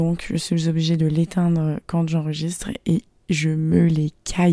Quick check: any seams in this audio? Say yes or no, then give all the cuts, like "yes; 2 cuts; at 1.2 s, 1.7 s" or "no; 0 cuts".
no; 0 cuts